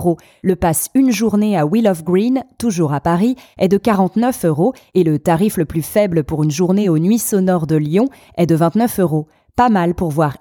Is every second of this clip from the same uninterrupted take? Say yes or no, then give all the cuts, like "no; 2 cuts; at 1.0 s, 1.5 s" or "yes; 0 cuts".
yes; 0 cuts